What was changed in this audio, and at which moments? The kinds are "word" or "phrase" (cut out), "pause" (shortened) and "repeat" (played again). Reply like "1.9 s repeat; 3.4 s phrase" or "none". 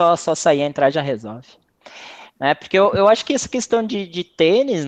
none